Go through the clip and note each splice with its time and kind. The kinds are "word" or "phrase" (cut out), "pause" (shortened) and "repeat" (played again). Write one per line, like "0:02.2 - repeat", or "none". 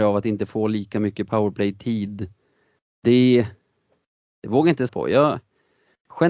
0:04.9 - word